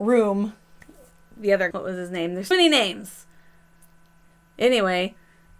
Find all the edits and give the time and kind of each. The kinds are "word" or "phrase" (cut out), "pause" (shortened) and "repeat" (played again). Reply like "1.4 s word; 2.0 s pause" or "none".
1.7 s word; 2.5 s word